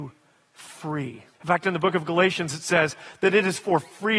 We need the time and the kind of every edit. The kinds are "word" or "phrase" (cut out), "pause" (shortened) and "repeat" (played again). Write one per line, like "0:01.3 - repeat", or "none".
0:01.3 - pause